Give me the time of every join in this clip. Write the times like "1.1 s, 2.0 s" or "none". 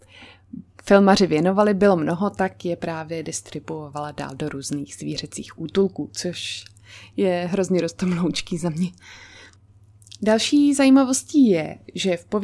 none